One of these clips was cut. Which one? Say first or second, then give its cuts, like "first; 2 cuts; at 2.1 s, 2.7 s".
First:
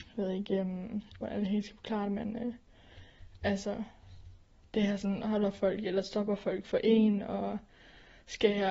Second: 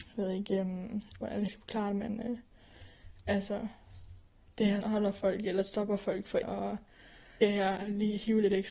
second; 4 cuts; at 1.5 s, 4.8 s, 6.4 s, 7.4 s